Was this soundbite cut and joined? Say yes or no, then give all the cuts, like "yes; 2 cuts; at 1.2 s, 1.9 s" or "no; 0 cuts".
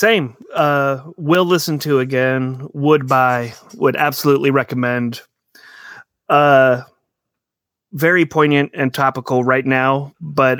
no; 0 cuts